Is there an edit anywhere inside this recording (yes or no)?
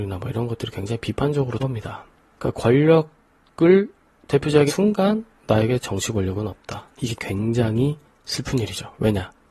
yes